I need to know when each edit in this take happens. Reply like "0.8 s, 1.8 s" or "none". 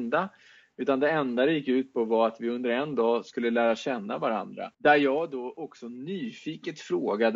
4.7 s